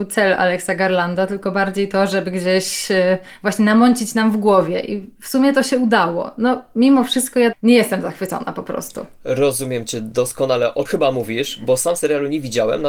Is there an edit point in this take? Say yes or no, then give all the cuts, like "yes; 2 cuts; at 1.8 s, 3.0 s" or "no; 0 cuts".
yes; 2 cuts; at 7.5 s, 10.9 s